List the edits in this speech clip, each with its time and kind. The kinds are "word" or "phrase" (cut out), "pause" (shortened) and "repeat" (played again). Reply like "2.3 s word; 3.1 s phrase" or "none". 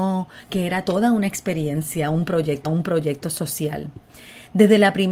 2.6 s repeat